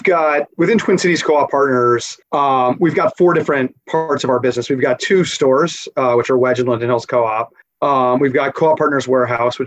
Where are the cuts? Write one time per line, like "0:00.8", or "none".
0:02.2
0:07.6

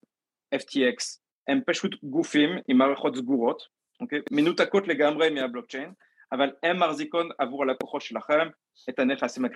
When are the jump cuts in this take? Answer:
none

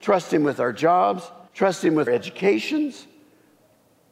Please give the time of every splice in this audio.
0:01.5
0:02.1

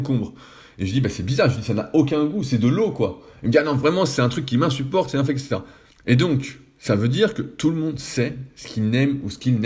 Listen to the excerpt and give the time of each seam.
0:05.9

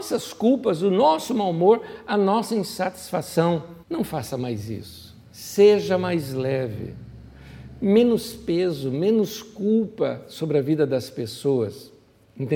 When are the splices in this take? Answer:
0:03.8
0:05.2

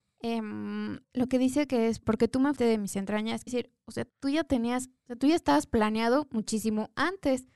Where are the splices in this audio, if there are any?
0:01.0
0:02.0
0:02.6
0:03.5
0:04.1

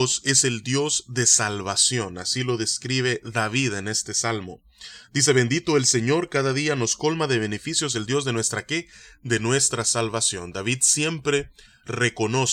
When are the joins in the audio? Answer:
none

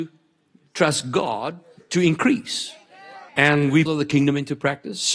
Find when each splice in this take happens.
0:01.8
0:03.3
0:03.9

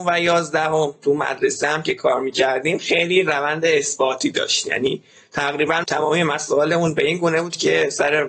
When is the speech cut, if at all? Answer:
0:05.8

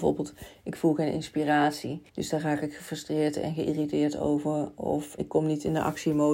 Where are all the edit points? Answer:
0:02.1
0:05.2

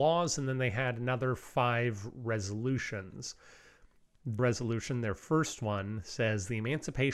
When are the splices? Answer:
0:04.4

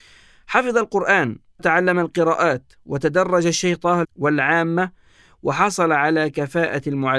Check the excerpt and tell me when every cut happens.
0:01.6
0:04.0

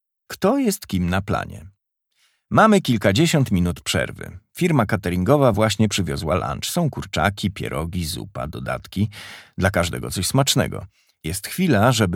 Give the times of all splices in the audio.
none

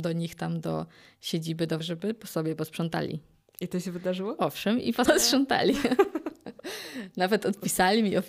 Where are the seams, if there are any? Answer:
0:01.8
0:05.1

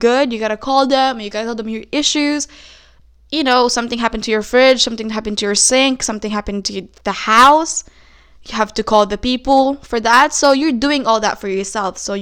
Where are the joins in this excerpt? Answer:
none

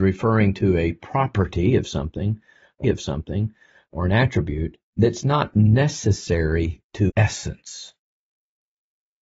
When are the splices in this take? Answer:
0:02.8
0:04.9
0:07.1

